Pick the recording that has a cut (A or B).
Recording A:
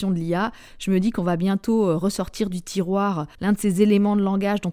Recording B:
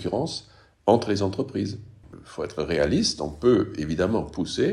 A